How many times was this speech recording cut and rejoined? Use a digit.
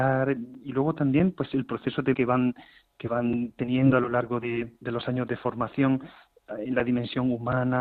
1